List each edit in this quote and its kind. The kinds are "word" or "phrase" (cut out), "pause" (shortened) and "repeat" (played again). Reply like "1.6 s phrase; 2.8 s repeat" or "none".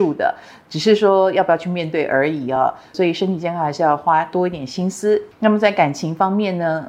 none

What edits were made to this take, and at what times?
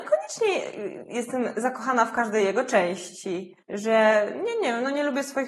3.6 s pause

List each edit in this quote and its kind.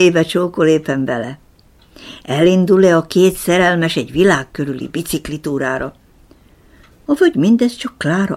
none

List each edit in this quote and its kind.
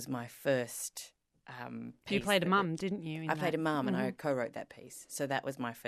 none

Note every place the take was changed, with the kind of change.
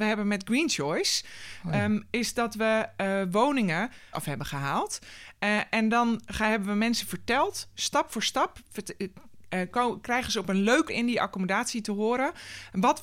4.1 s phrase; 10.9 s word

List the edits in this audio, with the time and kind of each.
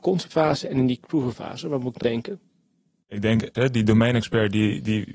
1.3 s word; 2.0 s word; 3.5 s word

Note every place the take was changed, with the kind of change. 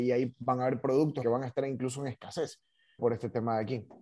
1.2 s word; 3.0 s word

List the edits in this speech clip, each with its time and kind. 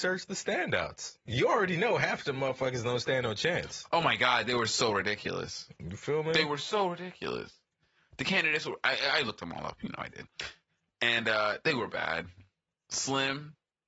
none

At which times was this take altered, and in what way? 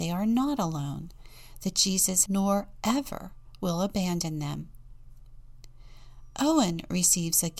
2.3 s phrase

